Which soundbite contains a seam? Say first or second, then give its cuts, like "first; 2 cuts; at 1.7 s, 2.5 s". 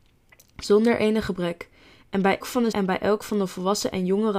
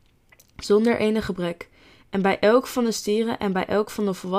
first; 2 cuts; at 2.4 s, 2.7 s